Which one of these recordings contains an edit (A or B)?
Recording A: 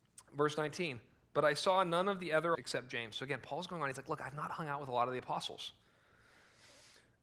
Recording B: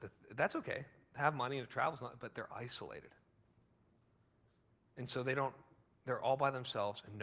A